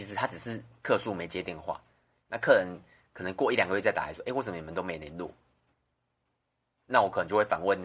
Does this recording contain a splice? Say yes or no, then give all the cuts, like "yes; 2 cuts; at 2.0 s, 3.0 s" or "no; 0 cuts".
no; 0 cuts